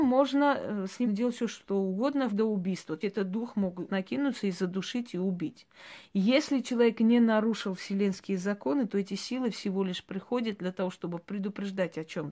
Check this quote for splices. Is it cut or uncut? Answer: cut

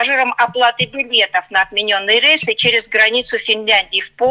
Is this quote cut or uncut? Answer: uncut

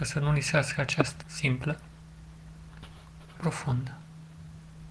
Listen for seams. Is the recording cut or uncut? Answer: cut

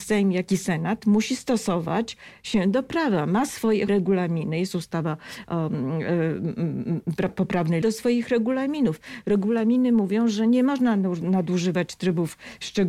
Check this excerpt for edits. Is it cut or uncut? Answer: cut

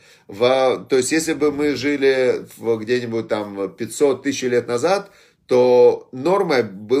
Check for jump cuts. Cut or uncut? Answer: uncut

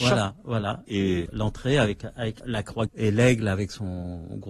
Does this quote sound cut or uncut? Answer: cut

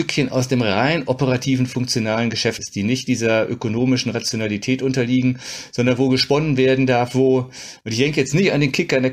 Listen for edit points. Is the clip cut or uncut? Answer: cut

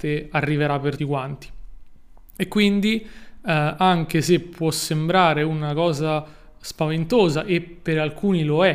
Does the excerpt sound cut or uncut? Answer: cut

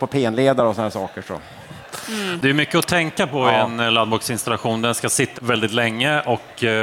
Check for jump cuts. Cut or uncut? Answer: cut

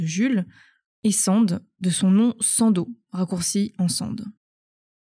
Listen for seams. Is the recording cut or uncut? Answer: uncut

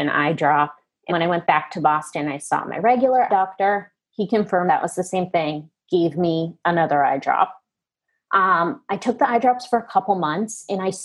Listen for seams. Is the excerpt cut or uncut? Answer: cut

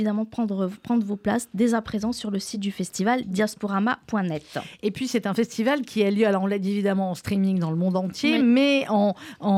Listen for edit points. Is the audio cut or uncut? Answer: uncut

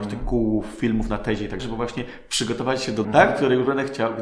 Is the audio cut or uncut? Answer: cut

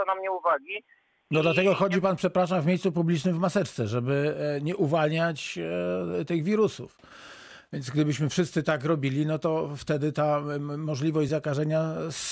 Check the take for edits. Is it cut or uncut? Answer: uncut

